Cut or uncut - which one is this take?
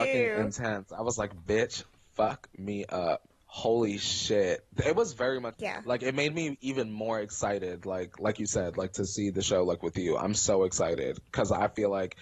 cut